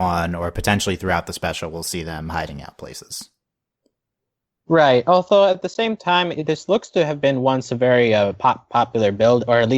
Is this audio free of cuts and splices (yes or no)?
yes